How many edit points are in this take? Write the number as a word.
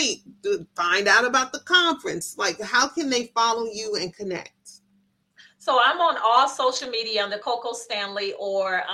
one